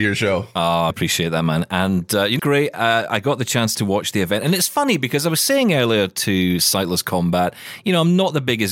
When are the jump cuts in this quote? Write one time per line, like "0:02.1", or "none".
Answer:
0:00.9
0:02.4